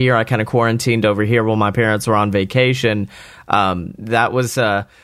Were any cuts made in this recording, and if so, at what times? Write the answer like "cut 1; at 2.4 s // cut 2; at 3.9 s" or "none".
none